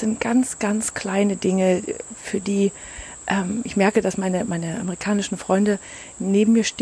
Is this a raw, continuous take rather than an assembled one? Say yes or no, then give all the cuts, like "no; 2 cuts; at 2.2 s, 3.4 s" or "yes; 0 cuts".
yes; 0 cuts